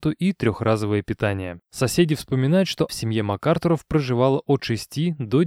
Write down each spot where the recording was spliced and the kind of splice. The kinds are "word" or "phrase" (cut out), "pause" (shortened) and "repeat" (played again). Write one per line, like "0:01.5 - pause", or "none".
0:01.6 - pause
0:02.9 - word